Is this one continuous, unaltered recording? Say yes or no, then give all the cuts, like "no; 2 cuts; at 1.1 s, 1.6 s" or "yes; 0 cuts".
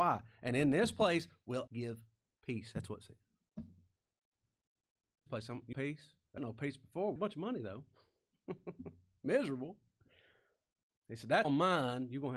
no; 6 cuts; at 1.7 s, 5.3 s, 5.7 s, 6.4 s, 7.2 s, 11.4 s